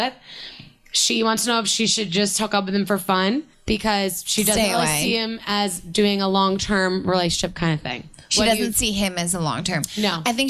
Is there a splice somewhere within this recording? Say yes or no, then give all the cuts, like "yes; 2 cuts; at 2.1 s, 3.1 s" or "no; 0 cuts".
yes; 1 cut; at 3.5 s